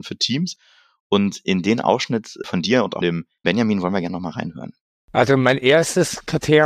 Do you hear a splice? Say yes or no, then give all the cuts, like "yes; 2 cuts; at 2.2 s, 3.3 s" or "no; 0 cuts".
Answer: yes; 1 cut; at 3.0 s